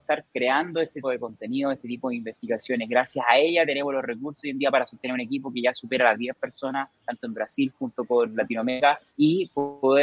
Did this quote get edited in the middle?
yes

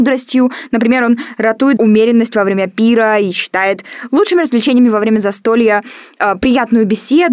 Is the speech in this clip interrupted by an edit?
yes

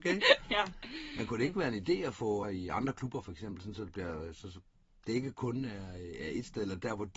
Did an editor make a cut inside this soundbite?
yes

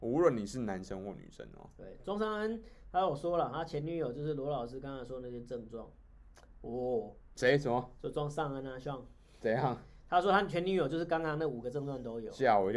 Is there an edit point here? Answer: no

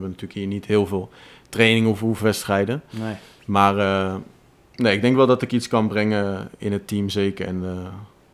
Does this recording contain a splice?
no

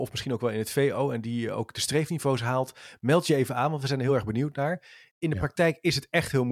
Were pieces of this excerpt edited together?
no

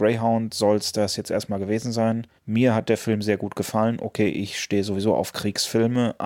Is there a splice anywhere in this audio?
yes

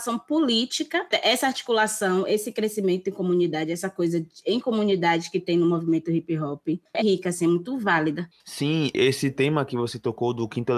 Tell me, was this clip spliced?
yes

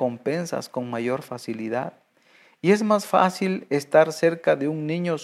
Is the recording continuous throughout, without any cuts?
yes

